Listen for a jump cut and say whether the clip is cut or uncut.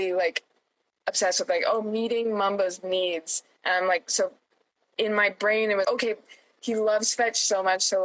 cut